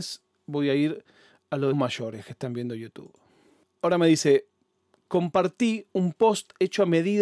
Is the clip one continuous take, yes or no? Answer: no